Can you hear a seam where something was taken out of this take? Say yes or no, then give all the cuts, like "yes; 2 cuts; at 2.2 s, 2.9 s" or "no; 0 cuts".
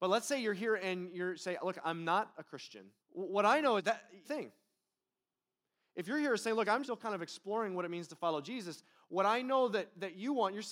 yes; 4 cuts; at 3.0 s, 3.8 s, 4.2 s, 6.8 s